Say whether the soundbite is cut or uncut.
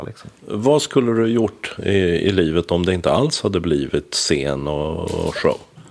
uncut